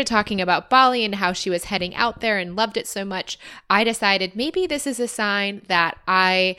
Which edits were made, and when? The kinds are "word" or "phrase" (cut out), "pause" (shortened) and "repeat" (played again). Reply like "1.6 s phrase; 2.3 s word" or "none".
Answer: none

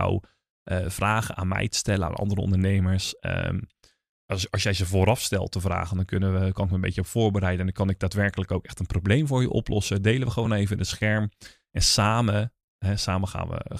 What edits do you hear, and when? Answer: none

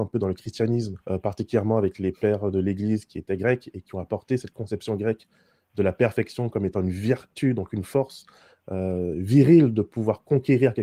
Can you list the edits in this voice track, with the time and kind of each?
1.0 s pause

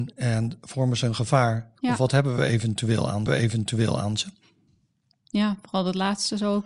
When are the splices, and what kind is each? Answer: 3.3 s repeat

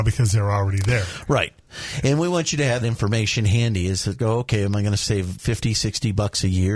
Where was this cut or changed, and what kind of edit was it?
2.8 s word

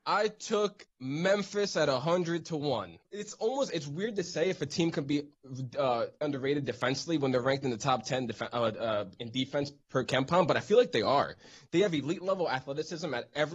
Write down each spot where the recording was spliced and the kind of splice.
6.2 s word

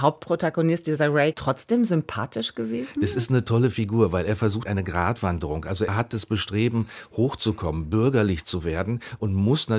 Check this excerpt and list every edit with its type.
1.3 s word; 4.7 s word; 5.9 s word

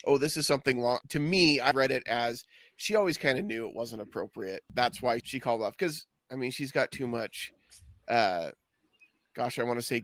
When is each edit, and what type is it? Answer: 1.0 s word; 1.7 s word; 5.2 s word; 6.2 s word

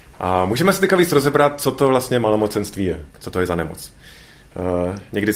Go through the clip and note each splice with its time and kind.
3.1 s pause

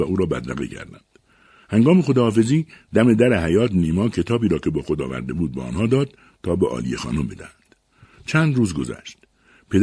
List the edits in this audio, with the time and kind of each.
none

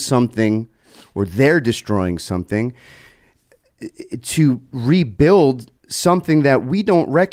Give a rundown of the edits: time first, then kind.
5.8 s pause

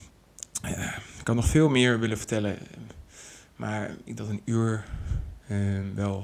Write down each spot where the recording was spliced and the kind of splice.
4.2 s word

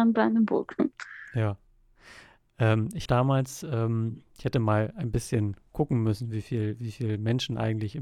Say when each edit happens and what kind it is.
3.1 s word

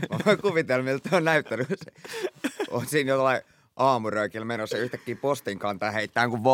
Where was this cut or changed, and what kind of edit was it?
none

